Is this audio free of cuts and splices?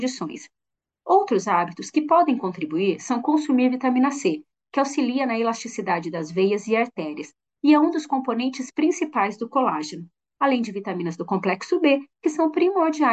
yes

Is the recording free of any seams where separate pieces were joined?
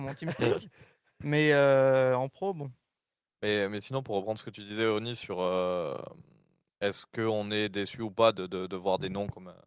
yes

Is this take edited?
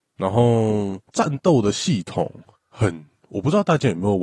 yes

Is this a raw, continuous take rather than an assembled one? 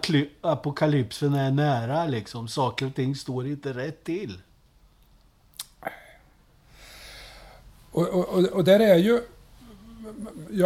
yes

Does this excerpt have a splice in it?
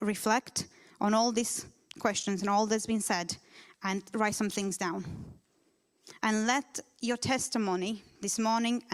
no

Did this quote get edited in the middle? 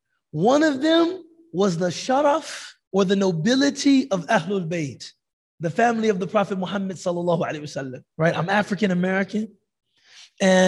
yes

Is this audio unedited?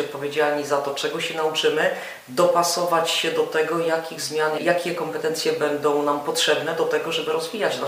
yes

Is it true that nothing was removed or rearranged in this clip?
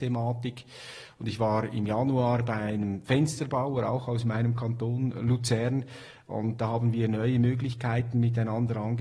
no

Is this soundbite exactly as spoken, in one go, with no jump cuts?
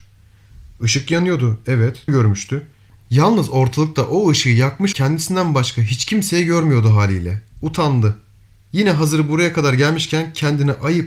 no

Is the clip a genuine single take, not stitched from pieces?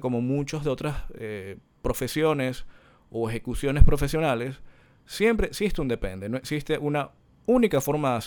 yes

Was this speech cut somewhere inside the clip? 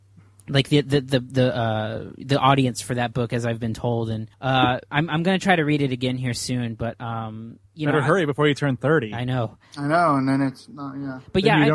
yes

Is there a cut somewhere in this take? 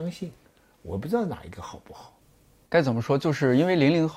no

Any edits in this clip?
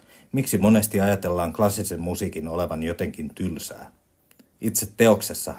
no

